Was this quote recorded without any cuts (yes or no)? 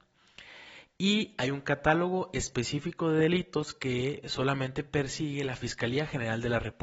yes